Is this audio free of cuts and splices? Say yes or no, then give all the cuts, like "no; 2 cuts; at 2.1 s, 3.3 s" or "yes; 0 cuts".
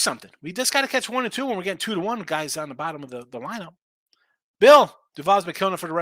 yes; 0 cuts